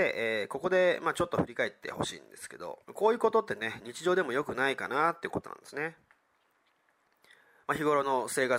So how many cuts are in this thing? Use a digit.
1